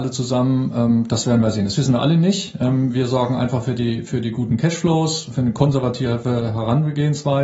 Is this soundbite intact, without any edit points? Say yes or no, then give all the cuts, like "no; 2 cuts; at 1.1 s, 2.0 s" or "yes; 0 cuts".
yes; 0 cuts